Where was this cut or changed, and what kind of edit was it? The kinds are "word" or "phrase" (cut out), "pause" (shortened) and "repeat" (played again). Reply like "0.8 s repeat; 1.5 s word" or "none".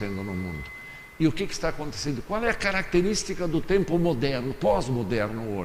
none